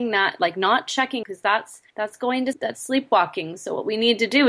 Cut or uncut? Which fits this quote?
cut